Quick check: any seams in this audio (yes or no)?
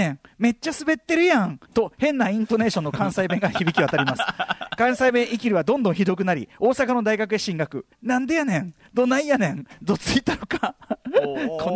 yes